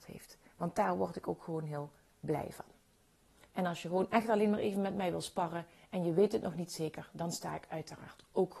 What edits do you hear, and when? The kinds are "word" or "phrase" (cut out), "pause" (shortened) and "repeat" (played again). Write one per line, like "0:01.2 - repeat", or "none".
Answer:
none